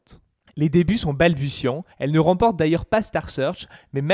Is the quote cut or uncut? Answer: cut